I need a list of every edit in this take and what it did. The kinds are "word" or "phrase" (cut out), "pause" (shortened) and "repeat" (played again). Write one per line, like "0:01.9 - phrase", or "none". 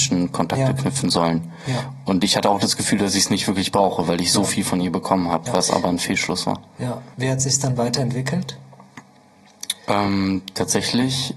0:07.1 - pause